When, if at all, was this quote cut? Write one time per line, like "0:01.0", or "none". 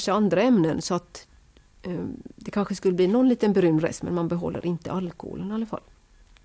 none